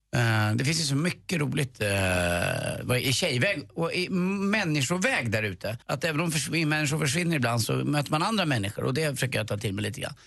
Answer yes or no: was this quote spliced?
yes